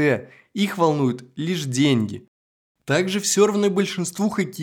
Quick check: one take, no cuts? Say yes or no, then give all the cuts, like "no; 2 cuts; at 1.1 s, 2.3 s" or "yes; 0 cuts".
no; 1 cut; at 2.5 s